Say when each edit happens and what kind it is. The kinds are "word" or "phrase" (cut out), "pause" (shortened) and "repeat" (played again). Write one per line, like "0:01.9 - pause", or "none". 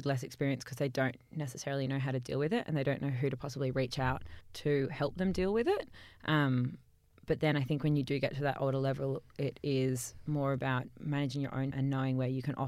0:04.4 - pause
0:11.7 - word